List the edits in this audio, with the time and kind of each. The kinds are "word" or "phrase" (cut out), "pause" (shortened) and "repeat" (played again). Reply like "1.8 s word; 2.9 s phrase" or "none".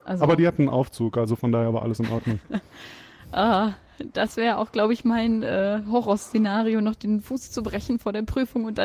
none